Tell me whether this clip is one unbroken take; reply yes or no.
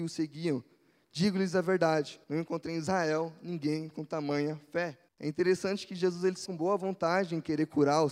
no